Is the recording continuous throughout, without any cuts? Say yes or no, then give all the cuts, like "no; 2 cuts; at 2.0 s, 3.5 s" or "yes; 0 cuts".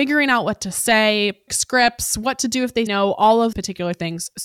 no; 3 cuts; at 1.5 s, 2.9 s, 3.5 s